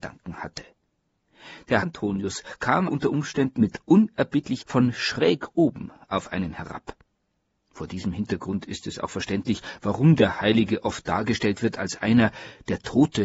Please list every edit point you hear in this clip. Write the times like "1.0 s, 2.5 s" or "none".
1.8 s, 2.9 s, 4.6 s